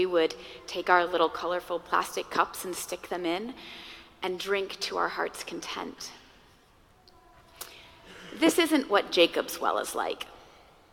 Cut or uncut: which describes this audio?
uncut